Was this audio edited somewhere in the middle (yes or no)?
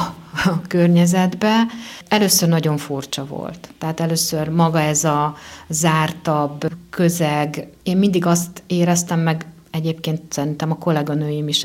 no